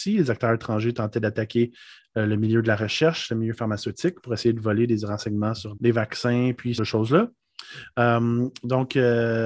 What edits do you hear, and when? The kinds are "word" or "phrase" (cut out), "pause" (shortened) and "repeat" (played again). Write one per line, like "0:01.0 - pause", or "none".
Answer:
0:05.8 - word
0:06.8 - phrase